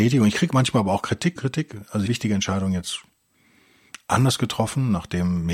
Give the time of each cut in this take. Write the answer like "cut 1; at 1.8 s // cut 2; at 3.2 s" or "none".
cut 1; at 1.4 s // cut 2; at 2.1 s